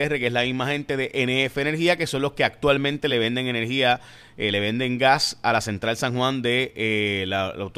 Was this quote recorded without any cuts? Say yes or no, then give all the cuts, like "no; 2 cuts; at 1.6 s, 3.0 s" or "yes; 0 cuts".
yes; 0 cuts